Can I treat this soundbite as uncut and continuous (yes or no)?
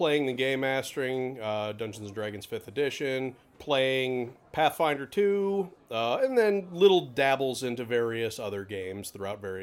yes